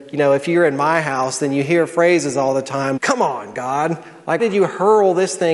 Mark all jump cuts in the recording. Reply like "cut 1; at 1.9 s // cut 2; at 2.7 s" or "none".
cut 1; at 3.0 s // cut 2; at 4.4 s